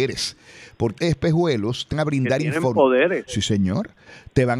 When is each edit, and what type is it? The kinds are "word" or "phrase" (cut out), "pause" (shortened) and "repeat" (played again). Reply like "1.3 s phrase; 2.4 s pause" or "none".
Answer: 1.0 s word; 1.9 s word